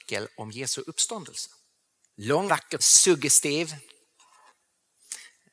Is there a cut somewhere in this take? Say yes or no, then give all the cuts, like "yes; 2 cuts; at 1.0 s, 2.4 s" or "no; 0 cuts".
yes; 2 cuts; at 2.5 s, 2.8 s